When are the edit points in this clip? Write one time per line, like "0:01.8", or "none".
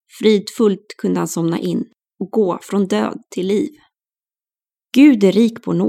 0:04.5